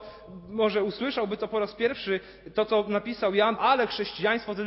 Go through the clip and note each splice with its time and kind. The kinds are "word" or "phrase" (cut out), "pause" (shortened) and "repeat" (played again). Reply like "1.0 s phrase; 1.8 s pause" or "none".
3.6 s word

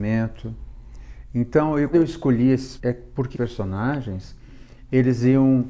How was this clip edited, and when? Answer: 1.9 s word; 2.8 s word; 3.3 s word

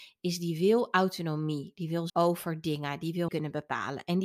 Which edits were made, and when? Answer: 2.1 s word; 3.3 s word

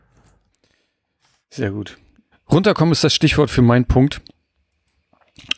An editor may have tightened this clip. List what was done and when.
2.3 s pause

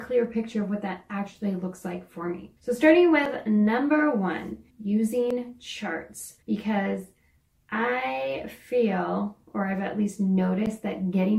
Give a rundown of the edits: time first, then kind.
2.6 s pause; 4.7 s pause; 6.4 s pause

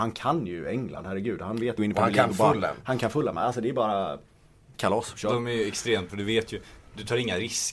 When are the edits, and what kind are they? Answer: 1.8 s phrase; 4.7 s word; 6.1 s phrase

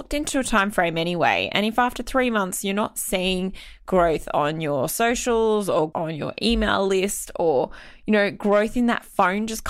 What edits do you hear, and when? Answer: 5.9 s word

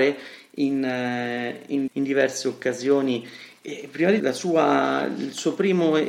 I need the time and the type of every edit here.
1.9 s word; 4.2 s word

